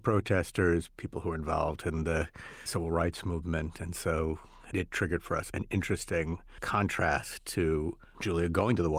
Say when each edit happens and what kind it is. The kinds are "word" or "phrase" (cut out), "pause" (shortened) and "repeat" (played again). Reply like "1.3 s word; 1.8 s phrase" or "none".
none